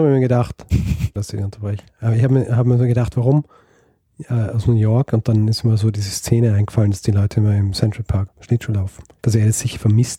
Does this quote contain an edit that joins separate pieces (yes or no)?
yes